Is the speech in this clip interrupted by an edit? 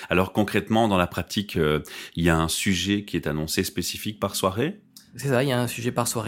no; 0 cuts

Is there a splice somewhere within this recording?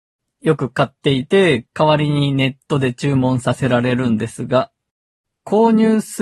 yes; 1 cut; at 1.7 s

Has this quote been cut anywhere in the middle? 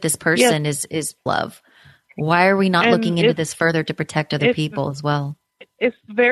yes; 1 cut; at 1.3 s

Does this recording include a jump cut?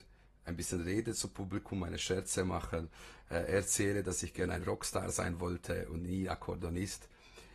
no; 0 cuts

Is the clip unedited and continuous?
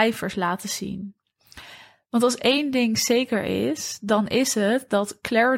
yes; 0 cuts

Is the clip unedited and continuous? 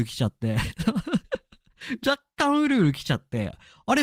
no; 1 cut; at 2.0 s

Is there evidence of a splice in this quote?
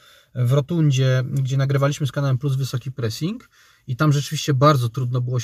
no; 0 cuts

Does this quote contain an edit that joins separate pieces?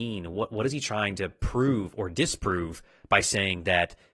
no; 0 cuts

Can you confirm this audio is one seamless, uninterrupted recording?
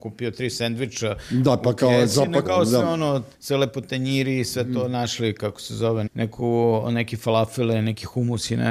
no; 3 cuts; at 2.4 s, 3.3 s, 6.1 s

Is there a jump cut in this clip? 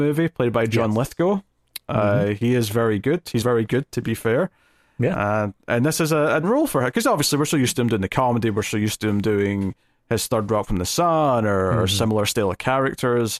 yes; 2 cuts; at 3.4 s, 6.4 s

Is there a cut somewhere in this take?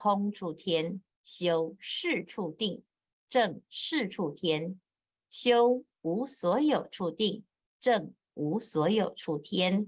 yes; 1 cut; at 1.1 s

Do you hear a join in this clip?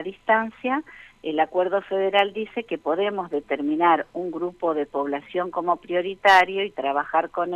no; 0 cuts

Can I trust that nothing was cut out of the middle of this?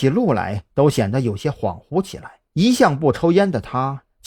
no; 1 cut; at 2.5 s

